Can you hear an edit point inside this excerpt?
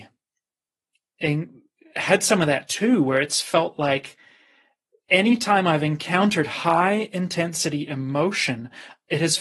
no; 0 cuts

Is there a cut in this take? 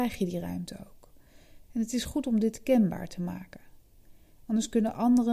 no; 0 cuts

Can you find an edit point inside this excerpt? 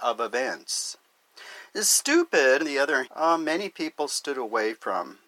yes; 2 cuts; at 2.6 s, 3.0 s

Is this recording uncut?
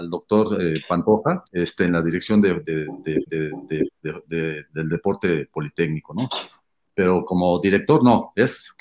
no; 2 cuts; at 1.5 s, 3.3 s

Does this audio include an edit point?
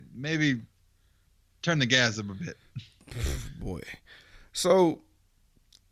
no; 0 cuts

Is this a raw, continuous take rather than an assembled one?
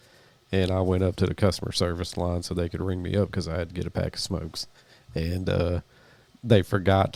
yes; 0 cuts

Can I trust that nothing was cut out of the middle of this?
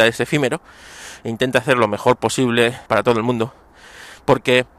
no; 1 cut; at 2.9 s

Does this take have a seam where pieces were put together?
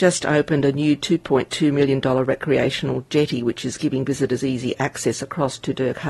no; 0 cuts

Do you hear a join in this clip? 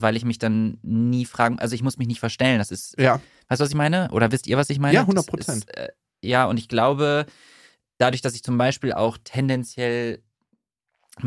no; 0 cuts

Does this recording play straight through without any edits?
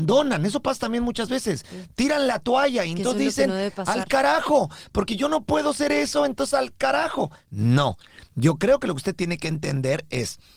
yes; 0 cuts

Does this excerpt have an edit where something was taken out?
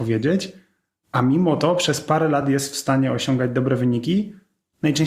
no; 0 cuts

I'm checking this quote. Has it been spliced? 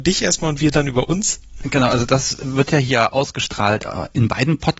no; 0 cuts

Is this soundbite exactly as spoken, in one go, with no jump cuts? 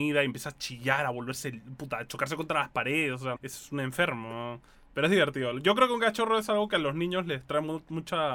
no; 1 cut; at 3.4 s

